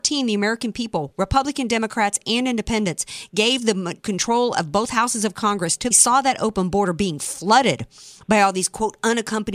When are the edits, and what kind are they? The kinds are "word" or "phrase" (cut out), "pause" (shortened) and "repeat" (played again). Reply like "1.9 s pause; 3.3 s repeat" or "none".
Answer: 4.0 s word; 5.9 s phrase